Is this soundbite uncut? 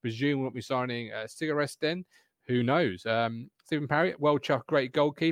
yes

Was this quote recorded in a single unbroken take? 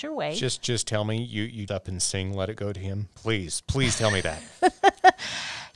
no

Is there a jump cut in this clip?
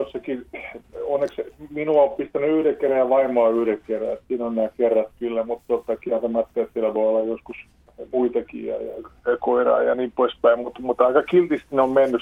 no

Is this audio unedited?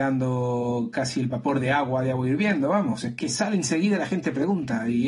yes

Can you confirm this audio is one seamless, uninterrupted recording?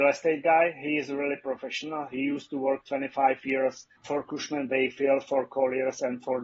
no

